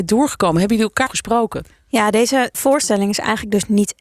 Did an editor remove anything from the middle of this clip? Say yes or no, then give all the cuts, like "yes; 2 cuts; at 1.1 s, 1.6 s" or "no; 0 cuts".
yes; 2 cuts; at 1.1 s, 2.5 s